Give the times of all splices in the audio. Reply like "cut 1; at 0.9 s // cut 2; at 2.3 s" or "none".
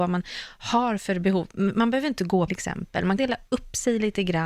cut 1; at 2.5 s // cut 2; at 3.2 s